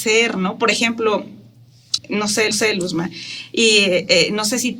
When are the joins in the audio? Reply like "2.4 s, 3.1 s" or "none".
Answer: 2.0 s, 2.5 s

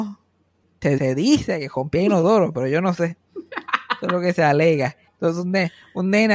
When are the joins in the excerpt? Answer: 1.0 s, 5.1 s

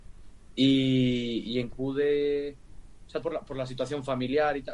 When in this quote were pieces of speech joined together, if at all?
1.7 s, 3.2 s

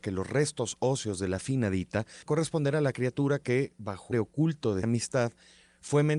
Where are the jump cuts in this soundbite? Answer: 2.3 s, 4.1 s, 4.8 s

